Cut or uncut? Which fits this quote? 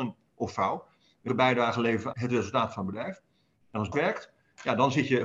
cut